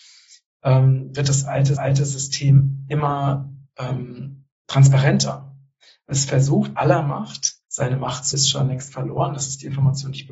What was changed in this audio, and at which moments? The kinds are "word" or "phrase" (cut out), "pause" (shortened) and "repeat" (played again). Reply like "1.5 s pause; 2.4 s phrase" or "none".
1.8 s repeat; 4.6 s pause; 6.8 s word; 7.6 s pause; 8.3 s phrase